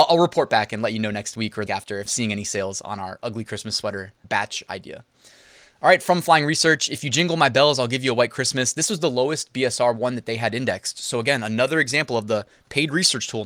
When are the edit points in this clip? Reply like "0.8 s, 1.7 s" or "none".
1.7 s, 2.1 s, 4.2 s